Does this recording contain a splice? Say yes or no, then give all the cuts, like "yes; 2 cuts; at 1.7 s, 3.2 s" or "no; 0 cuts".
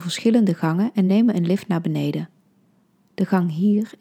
no; 0 cuts